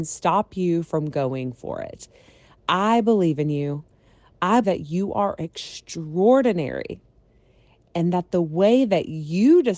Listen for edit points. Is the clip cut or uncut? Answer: cut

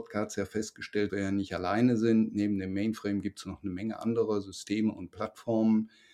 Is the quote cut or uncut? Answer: cut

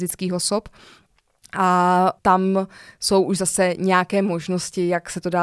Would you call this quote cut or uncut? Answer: uncut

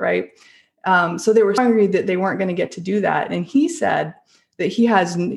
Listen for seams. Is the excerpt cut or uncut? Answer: cut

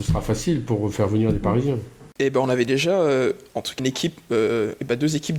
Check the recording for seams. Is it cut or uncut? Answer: cut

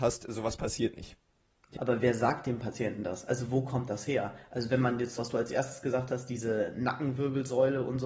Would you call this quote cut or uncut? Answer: cut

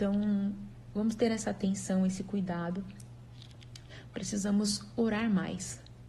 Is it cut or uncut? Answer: uncut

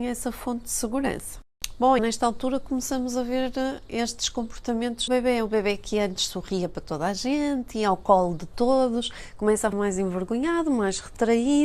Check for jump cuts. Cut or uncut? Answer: cut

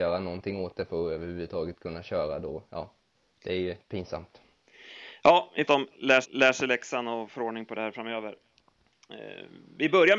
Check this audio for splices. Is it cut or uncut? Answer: cut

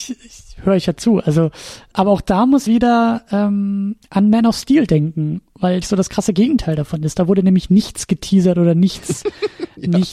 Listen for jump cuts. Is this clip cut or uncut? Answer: cut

